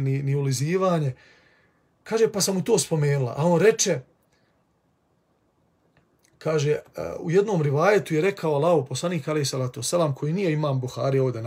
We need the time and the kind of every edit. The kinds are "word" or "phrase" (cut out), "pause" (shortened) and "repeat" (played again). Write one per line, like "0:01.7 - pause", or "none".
none

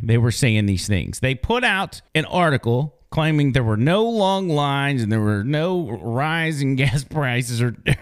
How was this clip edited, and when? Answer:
0:02.1 - pause

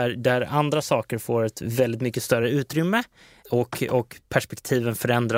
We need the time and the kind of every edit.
none

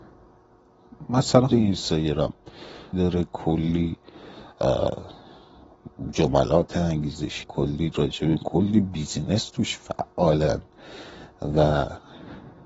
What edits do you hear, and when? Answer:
0:01.5 - word
0:02.9 - phrase
0:07.4 - word
0:08.4 - phrase

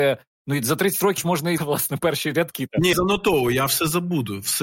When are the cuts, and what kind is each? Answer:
0:01.2 - word
0:01.6 - word
0:02.9 - word

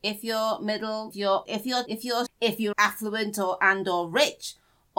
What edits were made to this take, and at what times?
0:01.1 - word
0:01.5 - word
0:01.9 - word
0:02.3 - word
0:02.7 - word

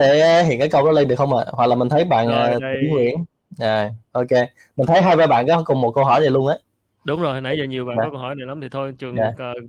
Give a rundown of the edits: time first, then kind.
none

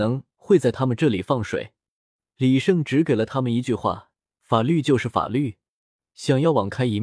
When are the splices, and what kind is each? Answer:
none

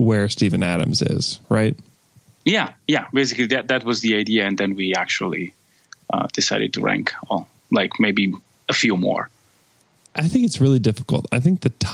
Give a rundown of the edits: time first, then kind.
0:01.4 - pause

